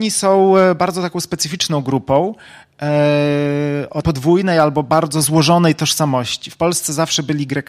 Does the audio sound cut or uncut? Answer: cut